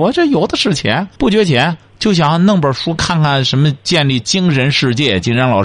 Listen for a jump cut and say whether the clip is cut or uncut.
cut